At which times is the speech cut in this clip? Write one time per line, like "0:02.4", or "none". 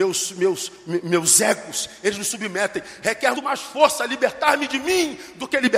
0:03.3